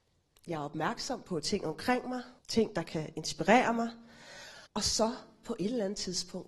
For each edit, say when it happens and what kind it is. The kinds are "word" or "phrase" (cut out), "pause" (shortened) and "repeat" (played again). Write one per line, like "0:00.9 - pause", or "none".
0:02.4 - pause
0:04.7 - pause